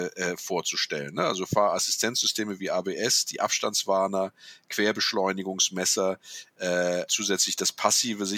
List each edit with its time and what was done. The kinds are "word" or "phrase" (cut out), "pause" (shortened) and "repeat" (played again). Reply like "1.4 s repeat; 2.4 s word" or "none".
7.1 s word